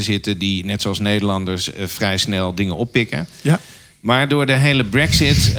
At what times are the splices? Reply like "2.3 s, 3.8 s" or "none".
none